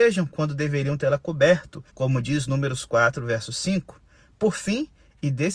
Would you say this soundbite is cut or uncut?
cut